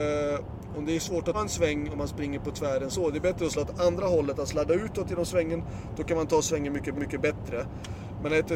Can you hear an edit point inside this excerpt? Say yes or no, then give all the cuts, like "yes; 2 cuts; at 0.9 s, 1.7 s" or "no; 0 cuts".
yes; 4 cuts; at 1.3 s, 2.9 s, 3.5 s, 6.9 s